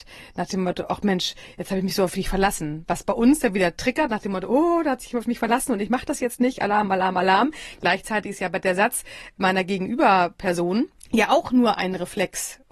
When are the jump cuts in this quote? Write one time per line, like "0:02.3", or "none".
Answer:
0:11.0